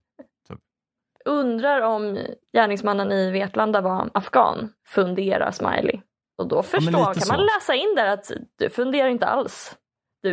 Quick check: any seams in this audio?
yes; 3 cuts; at 2.4 s, 4.8 s, 6.2 s

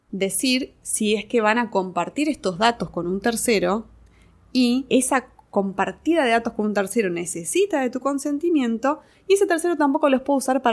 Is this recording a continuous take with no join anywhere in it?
yes; 0 cuts

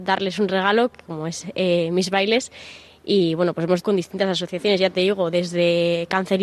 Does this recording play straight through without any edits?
no; 1 cut; at 3.8 s

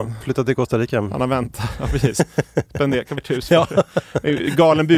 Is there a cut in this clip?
yes; 1 cut; at 3.2 s

